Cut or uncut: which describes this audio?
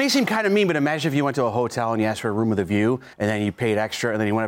cut